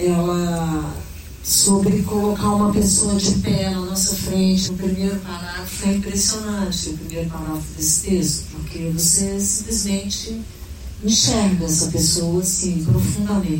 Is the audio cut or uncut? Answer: cut